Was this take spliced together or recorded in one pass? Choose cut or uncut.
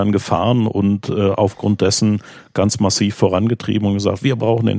uncut